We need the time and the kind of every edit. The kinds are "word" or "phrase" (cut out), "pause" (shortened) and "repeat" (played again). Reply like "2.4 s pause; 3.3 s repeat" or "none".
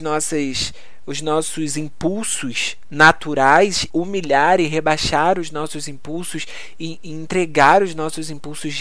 3.9 s word

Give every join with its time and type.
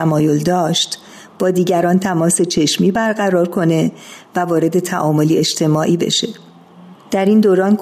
none

